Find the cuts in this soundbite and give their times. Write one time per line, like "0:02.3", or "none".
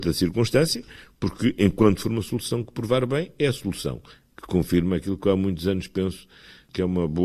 none

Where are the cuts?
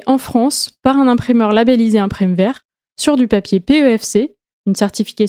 none

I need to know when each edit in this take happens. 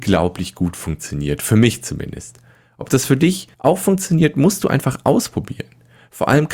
0:03.5

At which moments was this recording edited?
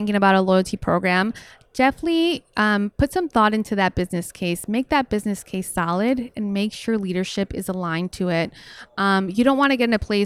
none

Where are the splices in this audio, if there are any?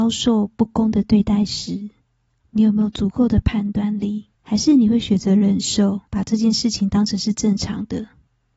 0:04.3
0:06.1

